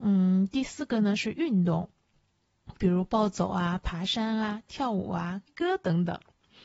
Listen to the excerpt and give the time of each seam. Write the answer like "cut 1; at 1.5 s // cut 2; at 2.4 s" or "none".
cut 1; at 5.5 s